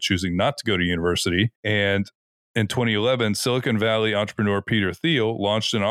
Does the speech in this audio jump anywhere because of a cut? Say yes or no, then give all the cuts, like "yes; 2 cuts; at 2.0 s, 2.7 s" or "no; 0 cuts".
yes; 1 cut; at 1.6 s